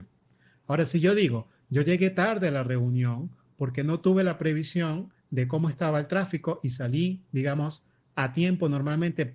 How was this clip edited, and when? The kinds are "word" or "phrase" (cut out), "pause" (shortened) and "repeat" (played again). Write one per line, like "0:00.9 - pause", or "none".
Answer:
none